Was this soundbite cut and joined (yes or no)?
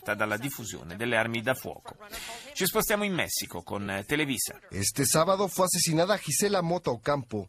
no